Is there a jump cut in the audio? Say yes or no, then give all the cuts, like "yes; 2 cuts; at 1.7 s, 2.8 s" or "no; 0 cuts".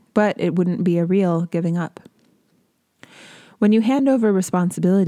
no; 0 cuts